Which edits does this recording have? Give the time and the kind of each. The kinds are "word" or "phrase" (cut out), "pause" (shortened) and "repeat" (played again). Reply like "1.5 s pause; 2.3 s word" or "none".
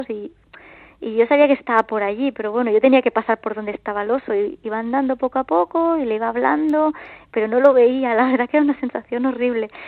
none